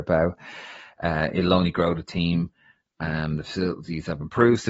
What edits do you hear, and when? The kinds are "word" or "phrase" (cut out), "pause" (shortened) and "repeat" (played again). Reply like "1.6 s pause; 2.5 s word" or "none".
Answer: none